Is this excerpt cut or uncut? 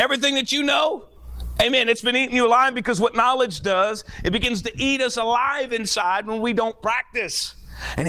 uncut